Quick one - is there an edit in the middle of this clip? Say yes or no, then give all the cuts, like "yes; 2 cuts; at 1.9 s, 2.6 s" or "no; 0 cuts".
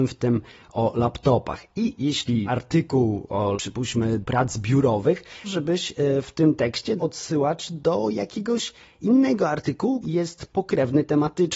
yes; 6 cuts; at 2.5 s, 3.5 s, 4.2 s, 5.4 s, 7.0 s, 10.0 s